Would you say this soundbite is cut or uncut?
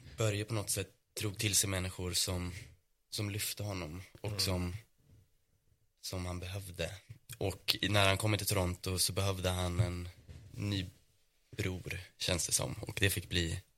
uncut